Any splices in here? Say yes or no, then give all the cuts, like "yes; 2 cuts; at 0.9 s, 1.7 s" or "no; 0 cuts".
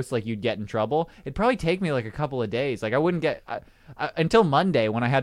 no; 0 cuts